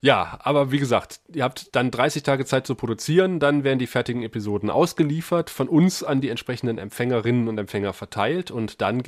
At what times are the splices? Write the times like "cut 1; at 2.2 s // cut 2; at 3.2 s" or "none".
none